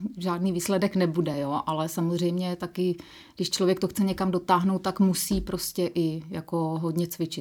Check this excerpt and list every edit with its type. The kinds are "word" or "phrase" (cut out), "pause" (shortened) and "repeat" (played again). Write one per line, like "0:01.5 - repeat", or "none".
none